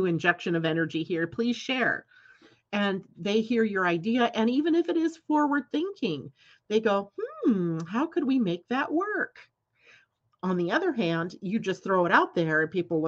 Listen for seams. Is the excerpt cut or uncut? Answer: uncut